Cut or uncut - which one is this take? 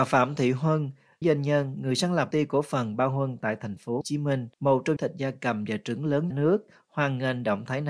cut